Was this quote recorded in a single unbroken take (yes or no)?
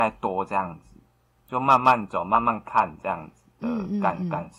yes